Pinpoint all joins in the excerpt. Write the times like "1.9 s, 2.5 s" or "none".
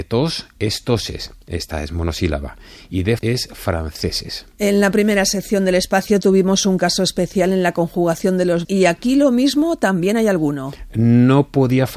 3.2 s, 8.6 s